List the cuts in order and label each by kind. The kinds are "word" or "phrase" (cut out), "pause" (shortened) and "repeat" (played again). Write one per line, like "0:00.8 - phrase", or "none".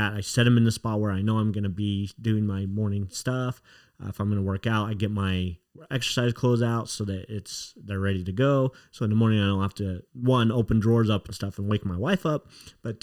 0:10.1 - pause